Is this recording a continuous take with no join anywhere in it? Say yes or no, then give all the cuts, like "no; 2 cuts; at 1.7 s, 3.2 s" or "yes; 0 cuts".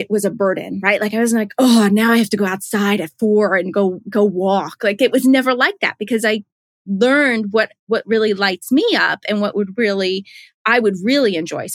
yes; 0 cuts